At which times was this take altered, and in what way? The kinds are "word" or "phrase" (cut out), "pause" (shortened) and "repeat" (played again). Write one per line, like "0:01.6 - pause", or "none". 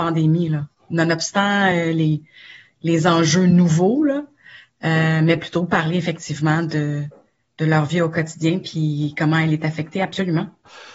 none